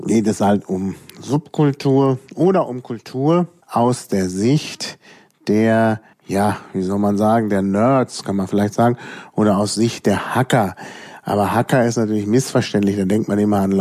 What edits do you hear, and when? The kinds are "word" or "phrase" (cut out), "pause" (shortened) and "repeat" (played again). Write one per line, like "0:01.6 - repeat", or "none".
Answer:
0:03.6 - pause
0:06.1 - pause

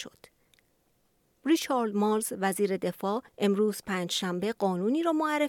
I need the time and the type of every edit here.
0:03.3 - pause

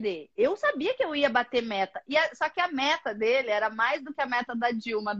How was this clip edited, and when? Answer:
none

